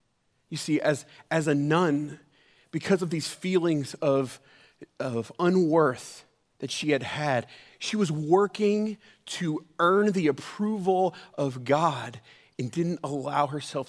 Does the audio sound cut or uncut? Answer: uncut